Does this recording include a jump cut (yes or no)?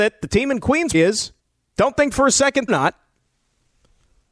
yes